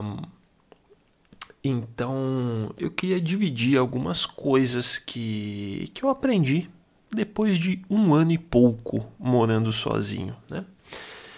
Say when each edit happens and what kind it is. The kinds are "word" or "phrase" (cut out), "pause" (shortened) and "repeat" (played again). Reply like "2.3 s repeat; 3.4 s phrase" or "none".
none

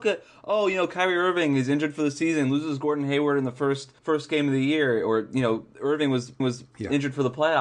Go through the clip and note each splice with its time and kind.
4.0 s pause; 6.4 s repeat

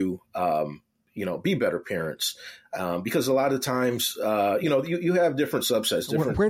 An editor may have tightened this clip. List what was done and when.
none

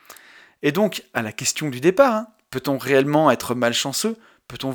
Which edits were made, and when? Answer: none

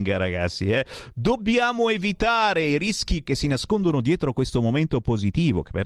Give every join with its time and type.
3.2 s word

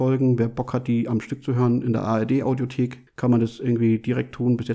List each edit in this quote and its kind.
3.1 s pause

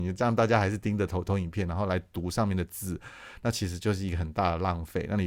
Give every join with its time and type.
none

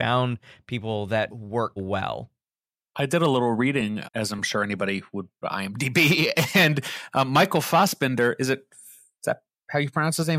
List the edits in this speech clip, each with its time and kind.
1.3 s word; 1.8 s word; 4.0 s word; 5.4 s word

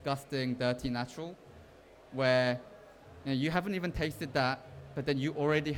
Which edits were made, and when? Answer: none

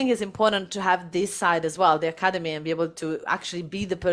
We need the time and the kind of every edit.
none

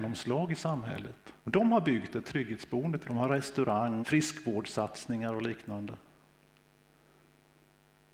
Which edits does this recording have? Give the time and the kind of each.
1.4 s pause; 3.0 s phrase; 4.0 s word

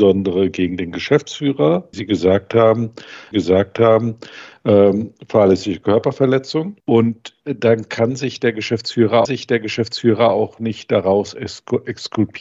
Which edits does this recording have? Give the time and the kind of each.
1.9 s phrase; 3.3 s repeat; 6.8 s pause; 9.2 s repeat

